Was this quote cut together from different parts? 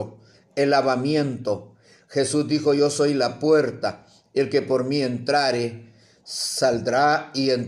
no; 0 cuts

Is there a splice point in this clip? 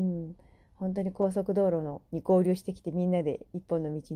yes; 1 cut; at 2.1 s

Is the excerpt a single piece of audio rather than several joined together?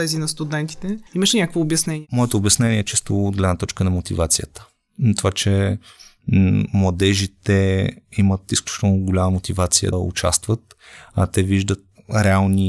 no; 2 cuts; at 1.1 s, 9.9 s

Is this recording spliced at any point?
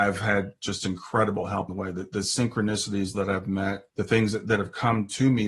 yes; 3 cuts; at 1.7 s, 3.1 s, 3.9 s

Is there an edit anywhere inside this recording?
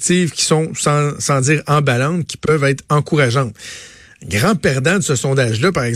no; 0 cuts

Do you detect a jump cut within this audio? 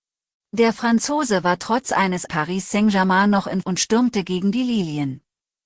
yes; 2 cuts; at 2.3 s, 3.6 s

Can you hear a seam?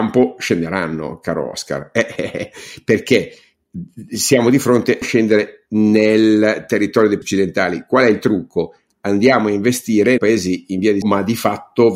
yes; 5 cuts; at 2.2 s, 5.0 s, 7.2 s, 10.2 s, 11.0 s

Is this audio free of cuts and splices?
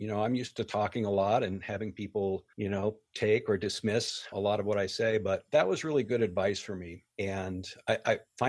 no; 2 cuts; at 2.5 s, 7.1 s

